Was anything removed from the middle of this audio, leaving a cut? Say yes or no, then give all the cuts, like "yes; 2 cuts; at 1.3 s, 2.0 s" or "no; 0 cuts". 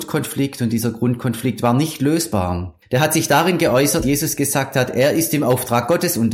yes; 2 cuts; at 2.8 s, 4.0 s